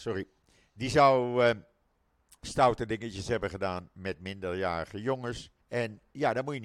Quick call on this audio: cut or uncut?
cut